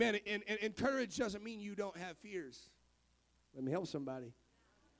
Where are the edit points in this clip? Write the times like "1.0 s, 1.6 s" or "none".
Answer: none